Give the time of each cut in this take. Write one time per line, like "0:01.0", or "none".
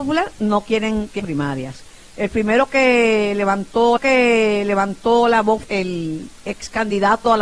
0:01.2
0:04.0
0:05.6